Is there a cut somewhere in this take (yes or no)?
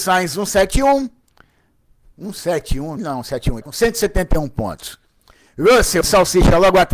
yes